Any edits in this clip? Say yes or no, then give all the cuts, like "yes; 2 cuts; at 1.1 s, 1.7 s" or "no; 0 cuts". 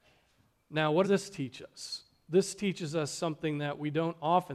yes; 1 cut; at 1.0 s